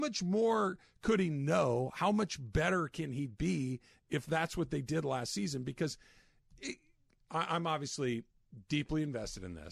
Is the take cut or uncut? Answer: uncut